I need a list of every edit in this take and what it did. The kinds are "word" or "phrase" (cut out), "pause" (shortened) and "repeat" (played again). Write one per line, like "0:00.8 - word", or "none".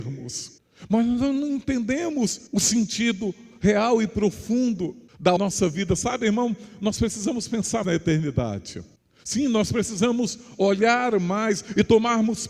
0:02.5 - pause
0:05.4 - phrase
0:07.8 - word